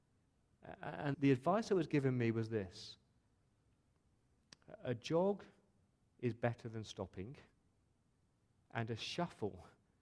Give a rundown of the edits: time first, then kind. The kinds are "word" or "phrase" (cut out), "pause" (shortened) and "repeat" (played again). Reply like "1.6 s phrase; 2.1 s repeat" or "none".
1.1 s word